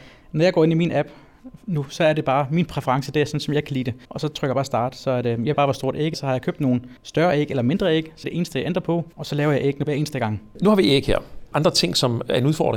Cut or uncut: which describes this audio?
cut